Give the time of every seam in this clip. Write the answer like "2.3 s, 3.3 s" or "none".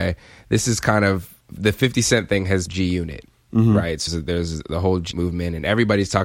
1.4 s, 2.7 s, 4.1 s, 5.1 s